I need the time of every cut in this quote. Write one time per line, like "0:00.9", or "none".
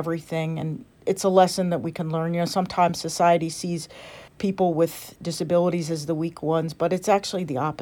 0:04.3